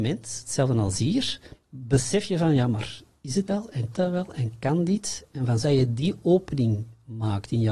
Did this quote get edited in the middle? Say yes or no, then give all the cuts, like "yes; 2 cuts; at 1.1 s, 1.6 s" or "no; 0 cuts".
yes; 4 cuts; at 1.6 s, 3.5 s, 3.9 s, 5.6 s